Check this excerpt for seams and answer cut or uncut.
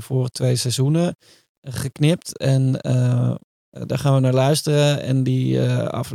uncut